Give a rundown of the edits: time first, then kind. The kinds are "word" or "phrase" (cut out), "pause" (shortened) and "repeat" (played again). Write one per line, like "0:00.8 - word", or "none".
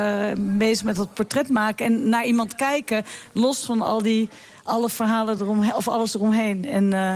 none